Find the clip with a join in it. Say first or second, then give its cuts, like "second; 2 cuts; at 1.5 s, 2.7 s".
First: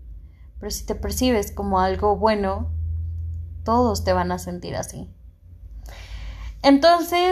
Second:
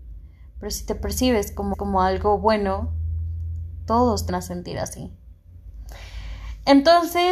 second; 2 cuts; at 1.7 s, 4.3 s